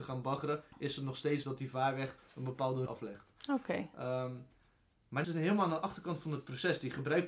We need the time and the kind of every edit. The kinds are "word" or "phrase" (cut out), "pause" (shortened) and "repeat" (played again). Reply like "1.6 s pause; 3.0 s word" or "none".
1.4 s word; 2.9 s word; 5.2 s word

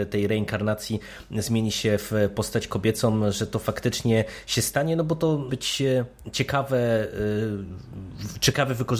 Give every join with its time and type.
5.5 s phrase

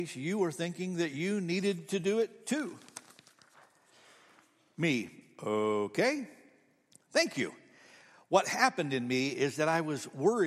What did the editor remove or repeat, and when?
none

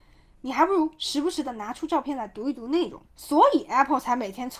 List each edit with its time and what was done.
3.1 s pause

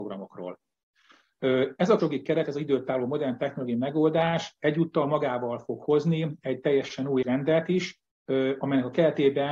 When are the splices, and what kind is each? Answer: 2.0 s word; 7.2 s word

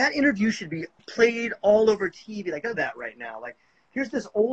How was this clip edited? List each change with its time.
1.0 s word; 2.7 s phrase

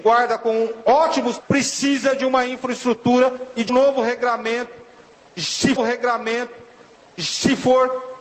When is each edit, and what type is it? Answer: 1.4 s word; 3.7 s word; 5.8 s repeat

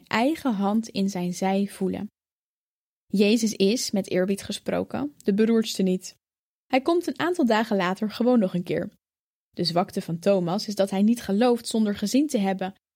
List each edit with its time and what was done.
none

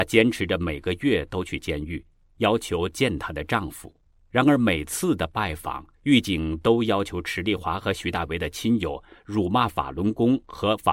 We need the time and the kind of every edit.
4.1 s pause; 5.9 s pause

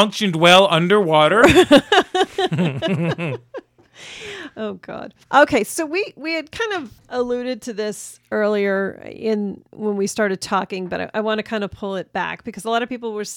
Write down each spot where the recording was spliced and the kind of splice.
5.2 s pause; 7.0 s pause; 9.7 s pause

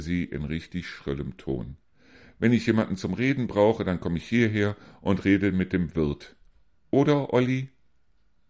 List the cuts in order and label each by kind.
none

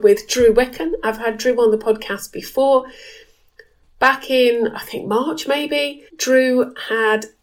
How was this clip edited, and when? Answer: 6.1 s pause

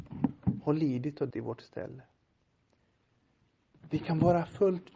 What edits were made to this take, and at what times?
1.3 s word

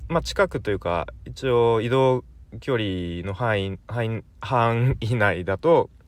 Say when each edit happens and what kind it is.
3.8 s pause

